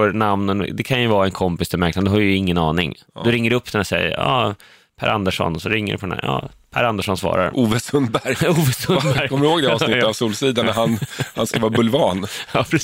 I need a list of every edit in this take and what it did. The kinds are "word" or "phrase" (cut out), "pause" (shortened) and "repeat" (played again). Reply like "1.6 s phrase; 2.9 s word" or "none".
none